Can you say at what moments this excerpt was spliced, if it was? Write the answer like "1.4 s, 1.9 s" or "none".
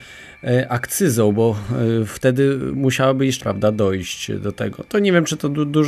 3.4 s